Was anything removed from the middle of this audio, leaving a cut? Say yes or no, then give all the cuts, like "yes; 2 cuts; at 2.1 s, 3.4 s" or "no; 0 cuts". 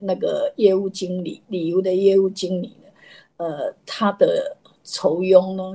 no; 0 cuts